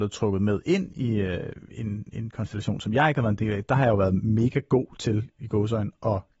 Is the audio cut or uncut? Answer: uncut